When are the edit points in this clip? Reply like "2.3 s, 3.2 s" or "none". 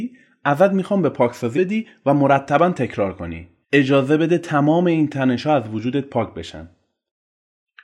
1.5 s, 3.6 s